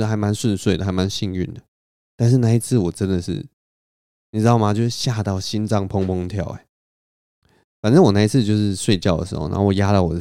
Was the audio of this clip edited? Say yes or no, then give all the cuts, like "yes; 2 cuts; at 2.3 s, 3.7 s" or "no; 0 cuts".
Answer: no; 0 cuts